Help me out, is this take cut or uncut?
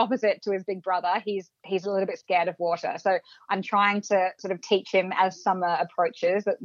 uncut